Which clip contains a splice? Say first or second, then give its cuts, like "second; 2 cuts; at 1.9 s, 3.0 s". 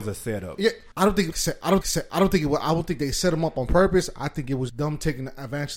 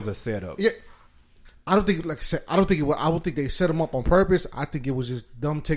first; 4 cuts; at 0.9 s, 1.3 s, 1.8 s, 4.7 s